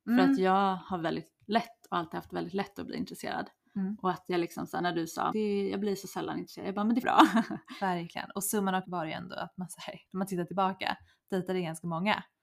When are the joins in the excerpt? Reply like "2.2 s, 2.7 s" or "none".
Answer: 5.3 s, 7.0 s, 8.8 s, 10.1 s